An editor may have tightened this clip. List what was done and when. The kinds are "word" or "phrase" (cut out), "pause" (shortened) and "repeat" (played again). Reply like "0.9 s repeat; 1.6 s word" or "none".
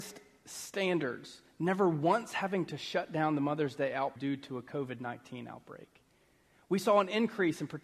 4.2 s word